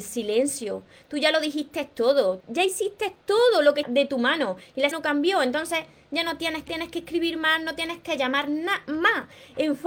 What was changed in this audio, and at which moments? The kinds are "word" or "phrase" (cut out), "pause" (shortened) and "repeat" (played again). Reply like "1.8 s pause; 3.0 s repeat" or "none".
2.4 s word; 3.8 s word; 4.9 s word; 6.7 s phrase